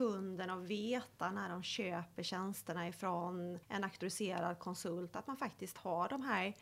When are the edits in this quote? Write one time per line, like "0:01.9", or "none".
0:03.6